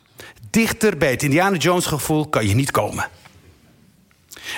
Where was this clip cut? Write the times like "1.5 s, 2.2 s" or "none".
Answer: none